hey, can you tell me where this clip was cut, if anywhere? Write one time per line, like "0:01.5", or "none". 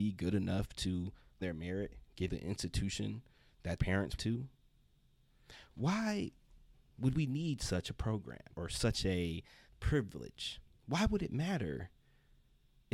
0:01.4
0:02.3
0:03.8
0:04.2
0:08.5
0:09.7